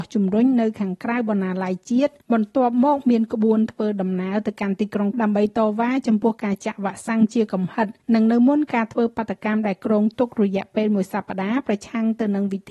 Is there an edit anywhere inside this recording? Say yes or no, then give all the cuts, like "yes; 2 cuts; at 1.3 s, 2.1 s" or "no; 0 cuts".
yes; 3 cuts; at 2.2 s, 5.1 s, 8.0 s